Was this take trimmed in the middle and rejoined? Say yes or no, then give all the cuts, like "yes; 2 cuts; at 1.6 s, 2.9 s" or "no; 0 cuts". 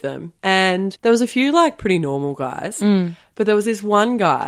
no; 0 cuts